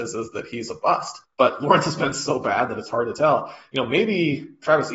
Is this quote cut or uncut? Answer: cut